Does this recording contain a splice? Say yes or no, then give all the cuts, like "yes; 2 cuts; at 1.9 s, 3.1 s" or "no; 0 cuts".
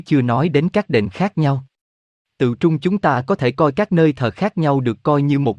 no; 0 cuts